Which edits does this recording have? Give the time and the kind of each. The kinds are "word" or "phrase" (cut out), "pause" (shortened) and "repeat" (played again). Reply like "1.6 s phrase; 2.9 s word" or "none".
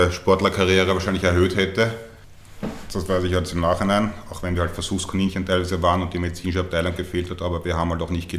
none